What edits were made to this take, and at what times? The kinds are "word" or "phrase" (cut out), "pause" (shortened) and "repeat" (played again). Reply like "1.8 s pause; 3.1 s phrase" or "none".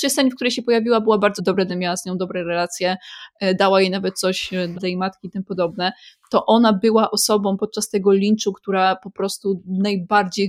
1.4 s word; 1.7 s word; 4.7 s word